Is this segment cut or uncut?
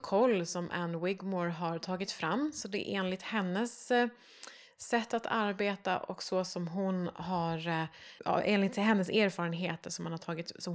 cut